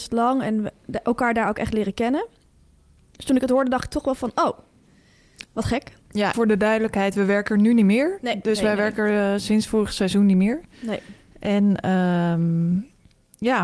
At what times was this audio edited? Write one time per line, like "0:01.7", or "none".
0:05.5
0:06.3